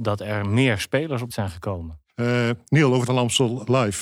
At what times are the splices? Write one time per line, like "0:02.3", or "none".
0:01.3
0:02.1
0:03.1